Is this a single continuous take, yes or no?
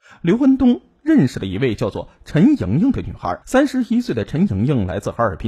no